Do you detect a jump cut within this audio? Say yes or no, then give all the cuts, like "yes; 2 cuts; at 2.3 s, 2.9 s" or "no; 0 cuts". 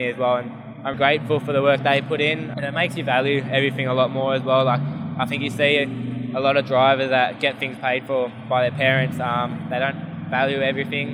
yes; 2 cuts; at 0.9 s, 2.5 s